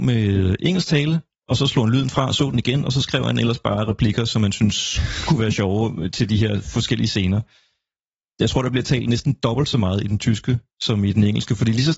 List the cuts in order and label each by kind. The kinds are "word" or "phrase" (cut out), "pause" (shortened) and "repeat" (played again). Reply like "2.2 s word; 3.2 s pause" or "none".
none